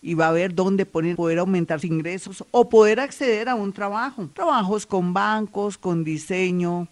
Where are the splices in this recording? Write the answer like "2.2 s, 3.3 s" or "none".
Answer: 1.1 s, 1.8 s, 4.3 s